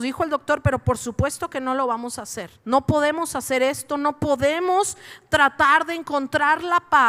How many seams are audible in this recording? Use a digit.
1